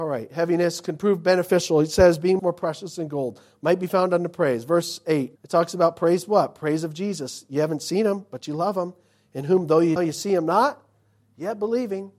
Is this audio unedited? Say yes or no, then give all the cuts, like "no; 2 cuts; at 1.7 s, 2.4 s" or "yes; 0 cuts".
no; 3 cuts; at 2.4 s, 5.4 s, 10.0 s